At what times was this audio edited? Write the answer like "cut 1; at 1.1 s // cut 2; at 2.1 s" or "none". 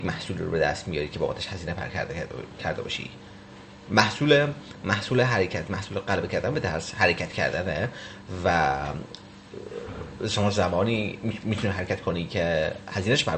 none